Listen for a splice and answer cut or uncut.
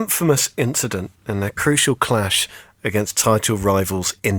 uncut